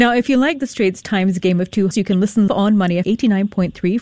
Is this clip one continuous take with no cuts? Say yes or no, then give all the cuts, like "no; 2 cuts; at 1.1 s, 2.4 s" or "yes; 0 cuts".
no; 3 cuts; at 1.9 s, 2.5 s, 3.0 s